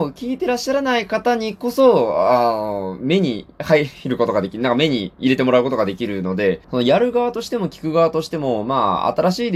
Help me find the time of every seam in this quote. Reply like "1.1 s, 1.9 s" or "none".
6.6 s